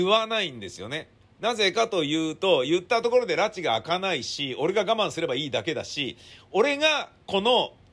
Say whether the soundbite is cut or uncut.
uncut